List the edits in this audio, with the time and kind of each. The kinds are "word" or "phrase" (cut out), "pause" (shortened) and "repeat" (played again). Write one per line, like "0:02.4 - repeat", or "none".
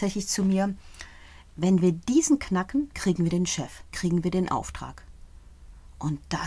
0:02.9 - word
0:03.9 - word